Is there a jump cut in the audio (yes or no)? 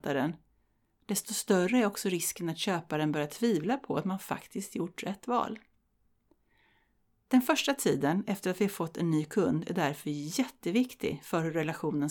no